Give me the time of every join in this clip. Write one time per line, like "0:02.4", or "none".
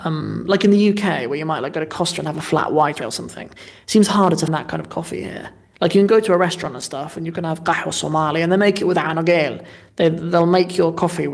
0:03.0
0:04.5